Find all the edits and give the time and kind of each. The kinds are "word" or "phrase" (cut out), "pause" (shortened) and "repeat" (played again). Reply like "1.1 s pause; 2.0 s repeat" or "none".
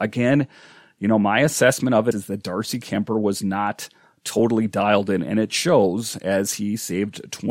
2.1 s word